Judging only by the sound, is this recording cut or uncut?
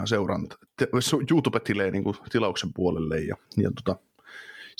cut